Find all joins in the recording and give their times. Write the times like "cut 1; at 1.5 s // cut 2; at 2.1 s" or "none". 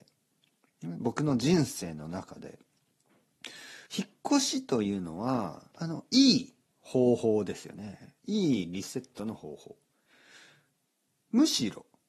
cut 1; at 3.9 s // cut 2; at 5.7 s // cut 3; at 8.2 s